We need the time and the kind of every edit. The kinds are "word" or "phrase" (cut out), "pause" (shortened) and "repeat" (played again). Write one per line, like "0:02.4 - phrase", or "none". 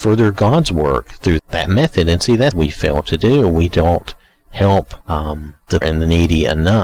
0:01.4 - word
0:02.5 - phrase
0:05.0 - pause
0:05.8 - word

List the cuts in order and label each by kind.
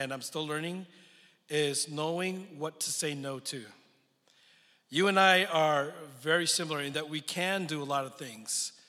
none

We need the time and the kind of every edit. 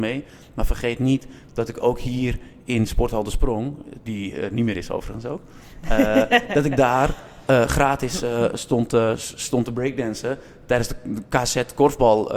none

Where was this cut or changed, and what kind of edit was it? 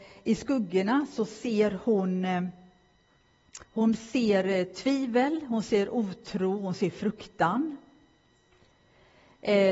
0:03.6 - pause

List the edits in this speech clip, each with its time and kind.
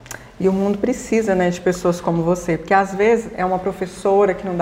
none

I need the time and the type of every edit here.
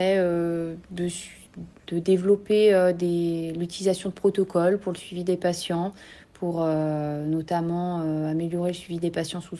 0:01.8 - pause

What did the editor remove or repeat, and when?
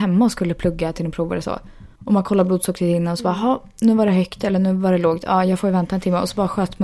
0:02.0 - pause

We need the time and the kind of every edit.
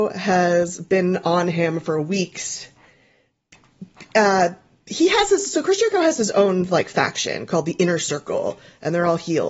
none

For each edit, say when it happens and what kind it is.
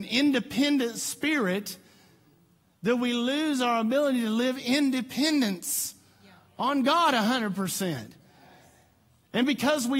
none

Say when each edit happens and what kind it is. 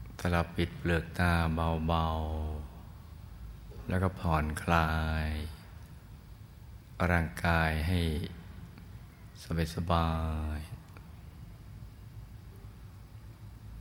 none

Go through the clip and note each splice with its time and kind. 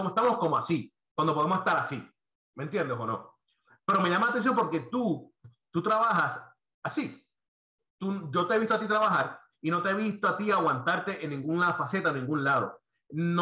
none

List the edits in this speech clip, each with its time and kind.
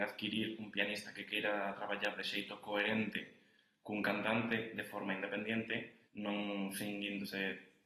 0:06.1 - pause

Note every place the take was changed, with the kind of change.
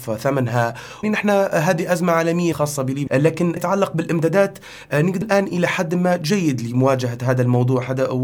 0:01.0 - word
0:02.5 - phrase
0:03.1 - word
0:03.6 - phrase
0:05.2 - phrase

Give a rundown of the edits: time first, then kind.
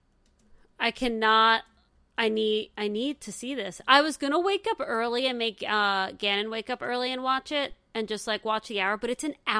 none

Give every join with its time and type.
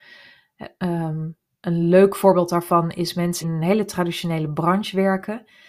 0:03.4 - word

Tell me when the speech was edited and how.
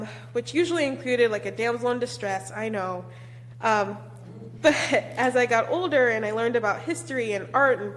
none

